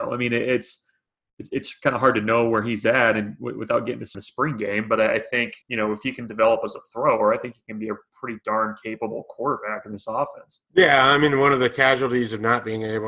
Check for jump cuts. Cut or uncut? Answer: cut